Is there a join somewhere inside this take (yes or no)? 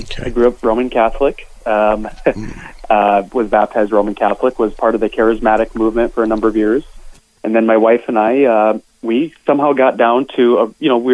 no